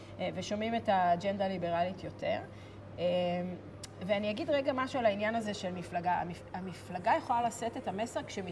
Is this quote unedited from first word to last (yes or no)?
yes